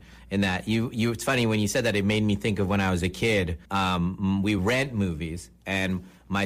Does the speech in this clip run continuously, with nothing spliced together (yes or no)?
no